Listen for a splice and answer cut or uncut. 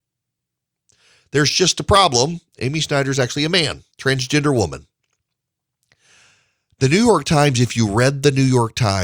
cut